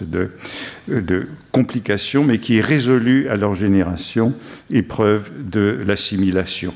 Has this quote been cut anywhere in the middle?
no; 0 cuts

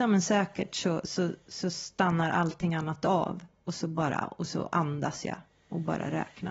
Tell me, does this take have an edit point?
no; 0 cuts

